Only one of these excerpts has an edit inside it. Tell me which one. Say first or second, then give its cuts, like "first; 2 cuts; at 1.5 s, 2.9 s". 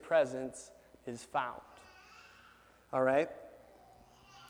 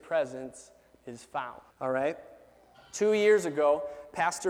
second; 2 cuts; at 1.7 s, 2.7 s